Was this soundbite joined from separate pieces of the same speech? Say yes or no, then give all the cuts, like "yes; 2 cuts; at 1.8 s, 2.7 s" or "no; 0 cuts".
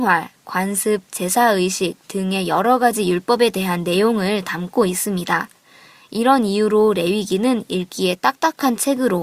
no; 0 cuts